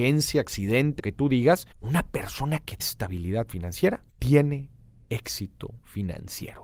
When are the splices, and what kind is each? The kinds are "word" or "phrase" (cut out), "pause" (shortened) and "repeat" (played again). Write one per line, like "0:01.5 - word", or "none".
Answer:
0:01.0 - word
0:01.7 - pause
0:02.8 - word
0:04.1 - pause